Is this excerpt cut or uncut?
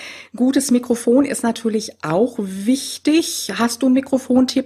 uncut